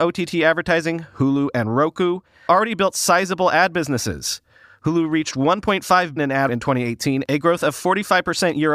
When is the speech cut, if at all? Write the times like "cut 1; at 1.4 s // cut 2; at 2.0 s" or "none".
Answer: cut 1; at 2.5 s // cut 2; at 6.2 s // cut 3; at 6.5 s